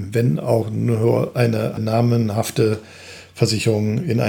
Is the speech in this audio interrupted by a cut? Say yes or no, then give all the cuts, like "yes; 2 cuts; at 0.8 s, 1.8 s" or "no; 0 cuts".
yes; 1 cut; at 1.8 s